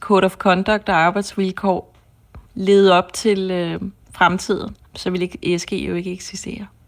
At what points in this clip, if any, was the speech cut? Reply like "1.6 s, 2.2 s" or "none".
2.5 s, 4.9 s